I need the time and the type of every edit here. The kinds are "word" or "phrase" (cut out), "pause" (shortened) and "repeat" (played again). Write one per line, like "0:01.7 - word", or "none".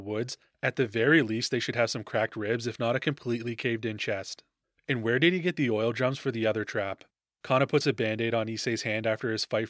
0:07.2 - pause